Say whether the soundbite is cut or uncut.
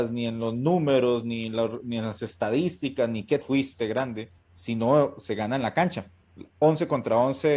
cut